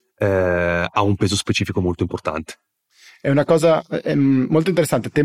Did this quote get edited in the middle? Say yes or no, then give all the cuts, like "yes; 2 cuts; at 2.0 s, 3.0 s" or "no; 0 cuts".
no; 0 cuts